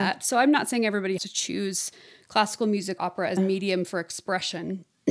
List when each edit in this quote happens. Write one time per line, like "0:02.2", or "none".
0:01.2
0:03.0
0:03.4